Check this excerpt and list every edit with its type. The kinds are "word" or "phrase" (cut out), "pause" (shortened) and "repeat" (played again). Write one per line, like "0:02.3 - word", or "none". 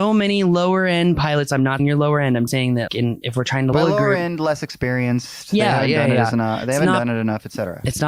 0:01.8 - word
0:02.5 - word
0:02.9 - word
0:03.7 - word

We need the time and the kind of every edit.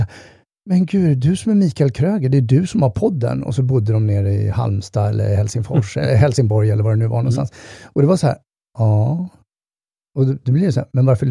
0:08.6 - pause

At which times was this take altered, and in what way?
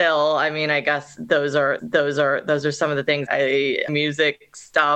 0:01.8 - repeat
0:03.3 - word
0:03.9 - phrase

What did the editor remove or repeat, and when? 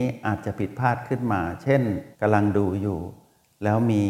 0:02.1 - pause

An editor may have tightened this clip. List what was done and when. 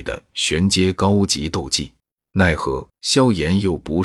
0:02.2 - pause
0:03.0 - pause

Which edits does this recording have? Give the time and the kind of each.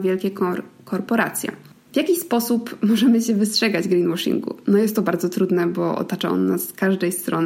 none

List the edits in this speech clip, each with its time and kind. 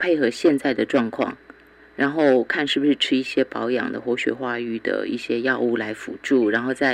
0:01.8 - word

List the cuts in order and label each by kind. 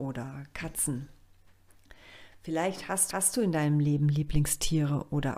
0:03.1 - repeat

